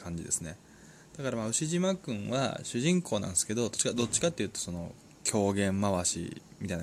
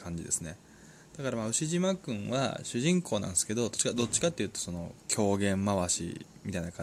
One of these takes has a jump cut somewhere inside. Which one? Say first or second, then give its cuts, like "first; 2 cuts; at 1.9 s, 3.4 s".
second; 1 cut; at 5.0 s